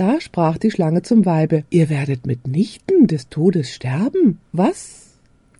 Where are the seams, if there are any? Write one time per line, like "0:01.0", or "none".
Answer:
0:01.7
0:04.4